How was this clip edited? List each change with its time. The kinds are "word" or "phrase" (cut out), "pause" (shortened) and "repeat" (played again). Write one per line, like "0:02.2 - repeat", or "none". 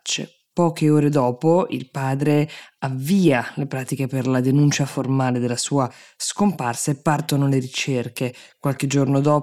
none